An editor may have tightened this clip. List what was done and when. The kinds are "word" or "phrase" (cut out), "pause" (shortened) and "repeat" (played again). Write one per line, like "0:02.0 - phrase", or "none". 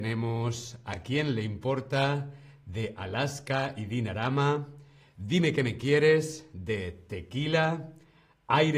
none